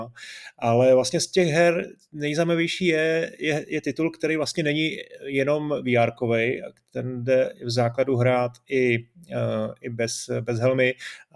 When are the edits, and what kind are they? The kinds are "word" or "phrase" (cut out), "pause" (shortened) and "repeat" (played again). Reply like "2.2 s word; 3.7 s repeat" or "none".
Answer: none